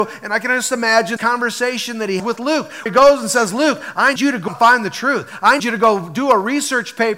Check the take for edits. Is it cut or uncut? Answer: cut